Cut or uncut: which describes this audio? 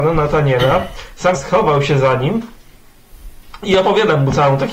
cut